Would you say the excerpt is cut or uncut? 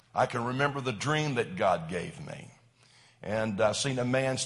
uncut